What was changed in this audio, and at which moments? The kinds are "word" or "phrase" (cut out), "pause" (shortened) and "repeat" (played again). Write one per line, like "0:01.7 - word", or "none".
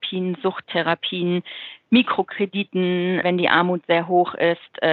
0:03.2 - word